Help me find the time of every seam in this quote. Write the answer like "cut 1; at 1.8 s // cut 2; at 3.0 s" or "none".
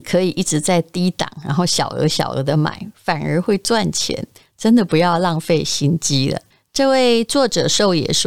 none